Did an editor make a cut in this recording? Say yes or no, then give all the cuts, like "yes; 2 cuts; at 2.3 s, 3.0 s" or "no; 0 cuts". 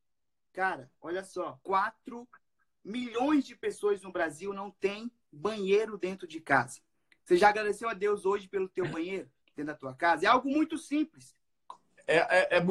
yes; 3 cuts; at 1.6 s, 6.9 s, 9.4 s